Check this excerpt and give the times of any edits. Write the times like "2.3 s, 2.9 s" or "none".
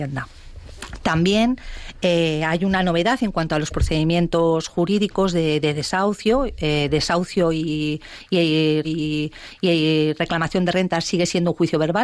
8.8 s